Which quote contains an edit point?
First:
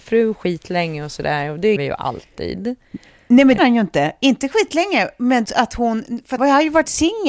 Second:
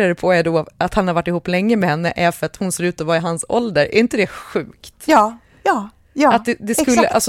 first; 4 cuts; at 1.8 s, 3.6 s, 5.4 s, 6.4 s

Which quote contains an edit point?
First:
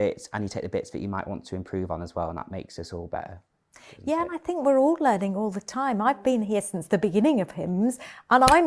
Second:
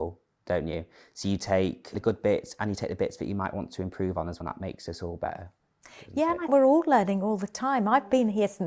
second; 3 cuts; at 1.9 s, 4.4 s, 6.5 s

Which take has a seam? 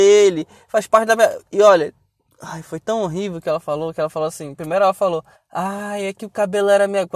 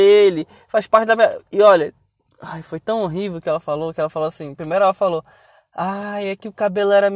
first; 1 cut; at 5.3 s

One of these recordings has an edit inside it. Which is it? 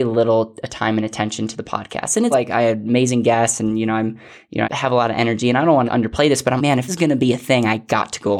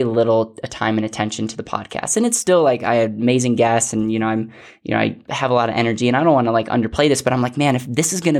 first; 5 cuts; at 2.3 s, 4.6 s, 5.9 s, 6.6 s, 6.9 s

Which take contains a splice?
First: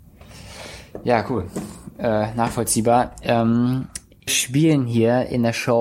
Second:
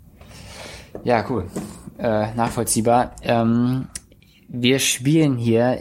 first; 1 cut; at 4.3 s

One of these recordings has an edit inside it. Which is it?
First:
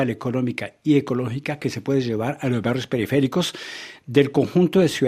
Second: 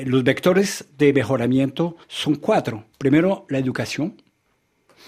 second; 2 cuts; at 2.0 s, 2.9 s

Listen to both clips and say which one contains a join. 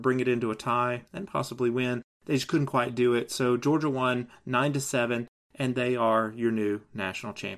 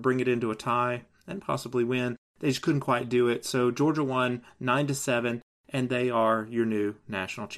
first; 1 cut; at 1.1 s

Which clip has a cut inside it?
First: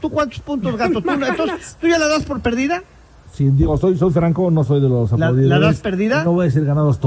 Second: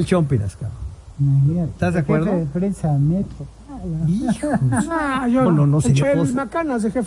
second; 2 cuts; at 5.5 s, 6.0 s

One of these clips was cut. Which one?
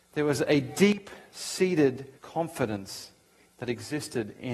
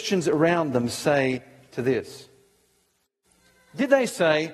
first; 1 cut; at 2.2 s

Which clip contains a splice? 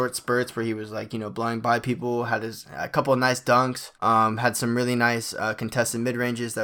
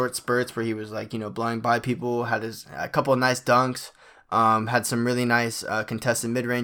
first; 1 cut; at 3.9 s

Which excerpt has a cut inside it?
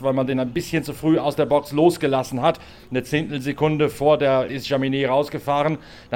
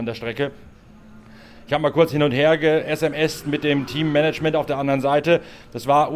first; 1 cut; at 4.5 s

